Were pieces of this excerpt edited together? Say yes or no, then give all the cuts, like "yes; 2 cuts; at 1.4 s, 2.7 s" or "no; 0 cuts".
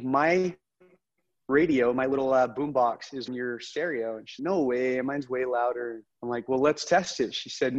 yes; 3 cuts; at 3.3 s, 4.4 s, 6.1 s